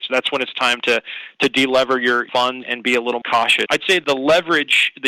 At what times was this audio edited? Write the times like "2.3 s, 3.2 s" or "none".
2.6 s, 3.2 s, 3.7 s